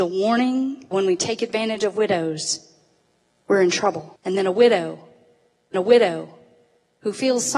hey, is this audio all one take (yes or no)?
no